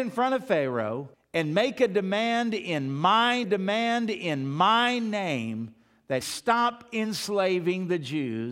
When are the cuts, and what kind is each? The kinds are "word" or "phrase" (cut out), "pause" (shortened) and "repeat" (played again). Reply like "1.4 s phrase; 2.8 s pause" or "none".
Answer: 1.1 s pause; 3.4 s repeat; 6.2 s word